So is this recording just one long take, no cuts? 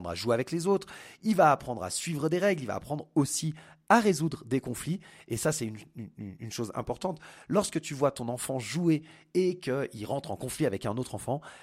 yes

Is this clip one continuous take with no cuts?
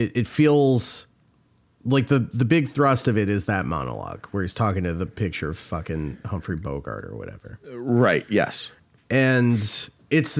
yes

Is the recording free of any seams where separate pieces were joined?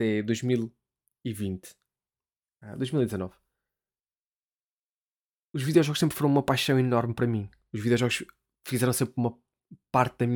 yes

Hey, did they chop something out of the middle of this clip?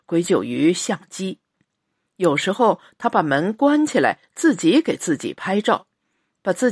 no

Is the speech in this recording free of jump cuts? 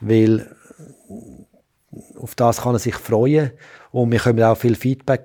yes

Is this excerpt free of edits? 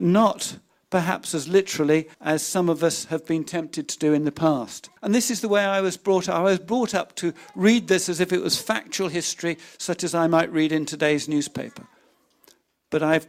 no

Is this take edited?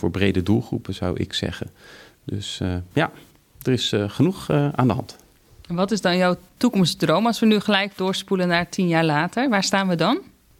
no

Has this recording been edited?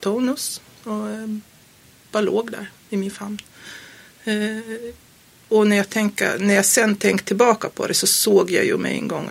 no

